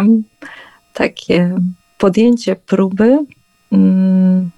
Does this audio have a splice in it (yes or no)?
no